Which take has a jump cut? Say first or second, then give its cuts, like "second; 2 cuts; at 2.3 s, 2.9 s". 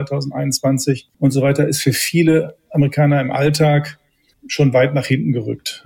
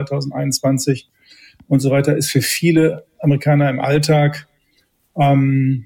first; 2 cuts; at 1.1 s, 4.3 s